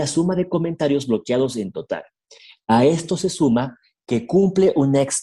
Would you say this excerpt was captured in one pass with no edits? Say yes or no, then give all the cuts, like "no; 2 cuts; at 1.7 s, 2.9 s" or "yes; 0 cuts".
yes; 0 cuts